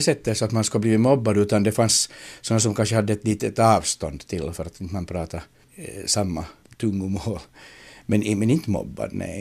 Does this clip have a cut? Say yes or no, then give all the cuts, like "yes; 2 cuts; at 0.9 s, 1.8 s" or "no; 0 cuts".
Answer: no; 0 cuts